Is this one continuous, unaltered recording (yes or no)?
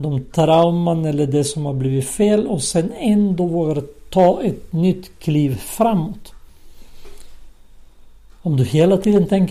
yes